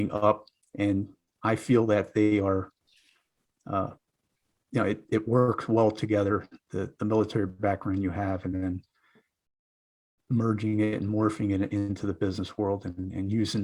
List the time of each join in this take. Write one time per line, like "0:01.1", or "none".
none